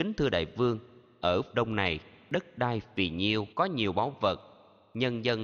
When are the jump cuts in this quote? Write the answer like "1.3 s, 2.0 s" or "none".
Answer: 1.5 s, 3.5 s